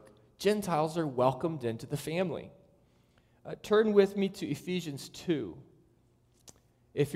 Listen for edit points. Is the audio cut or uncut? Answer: uncut